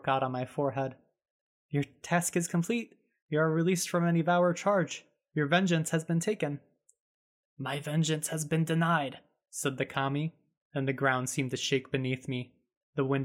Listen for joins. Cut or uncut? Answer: uncut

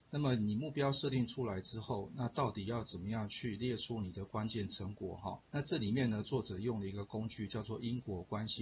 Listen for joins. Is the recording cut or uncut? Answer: cut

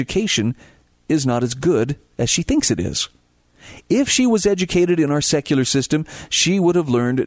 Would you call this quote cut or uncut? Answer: uncut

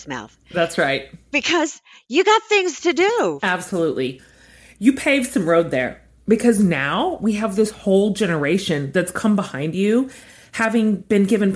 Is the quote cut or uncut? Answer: uncut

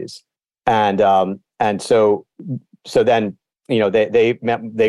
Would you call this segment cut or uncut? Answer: uncut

